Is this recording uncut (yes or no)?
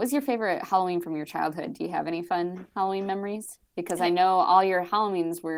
no